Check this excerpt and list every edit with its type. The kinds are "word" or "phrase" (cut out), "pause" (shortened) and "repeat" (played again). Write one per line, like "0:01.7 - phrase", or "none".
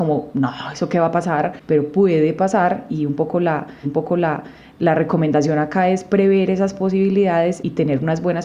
0:02.9 - word
0:03.8 - repeat